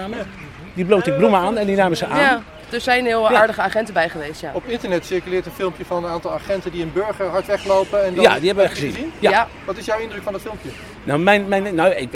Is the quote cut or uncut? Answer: uncut